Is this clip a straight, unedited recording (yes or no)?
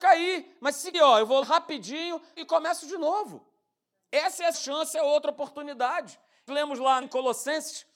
no